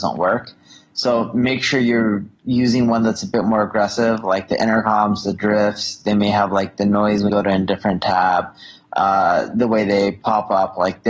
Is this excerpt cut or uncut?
cut